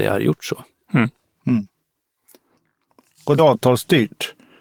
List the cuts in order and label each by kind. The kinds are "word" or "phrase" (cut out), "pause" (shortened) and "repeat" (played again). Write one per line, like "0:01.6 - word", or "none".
0:03.4 - word